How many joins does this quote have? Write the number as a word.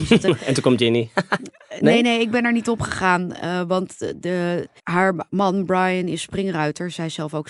one